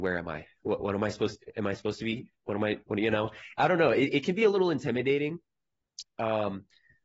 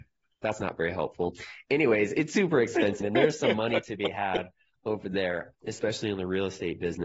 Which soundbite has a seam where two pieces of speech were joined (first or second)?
second